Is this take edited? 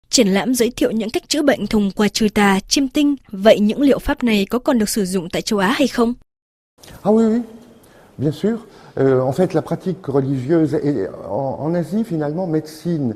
no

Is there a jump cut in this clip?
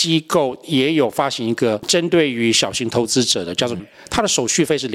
yes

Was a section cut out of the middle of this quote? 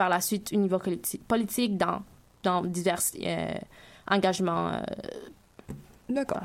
no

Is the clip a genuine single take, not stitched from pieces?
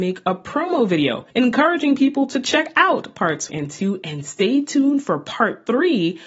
no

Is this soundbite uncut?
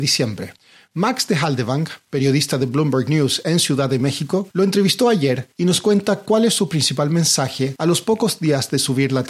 yes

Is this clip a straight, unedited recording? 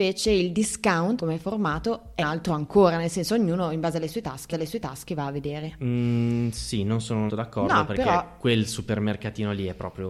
no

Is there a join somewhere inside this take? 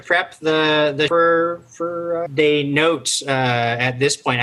yes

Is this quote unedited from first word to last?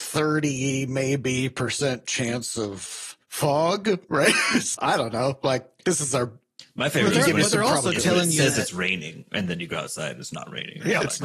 no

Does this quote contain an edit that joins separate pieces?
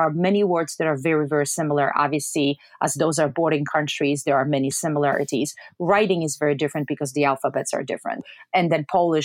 no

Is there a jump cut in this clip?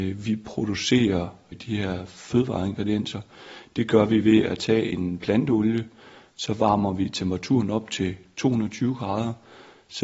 no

